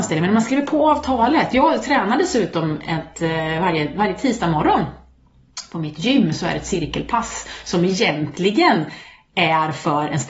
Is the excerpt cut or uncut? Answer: uncut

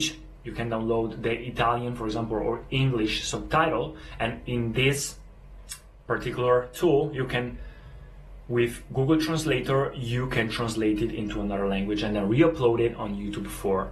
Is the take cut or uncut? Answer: uncut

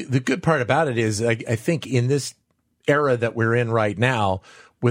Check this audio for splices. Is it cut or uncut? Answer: uncut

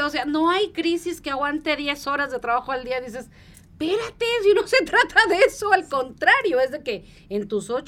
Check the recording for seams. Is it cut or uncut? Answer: uncut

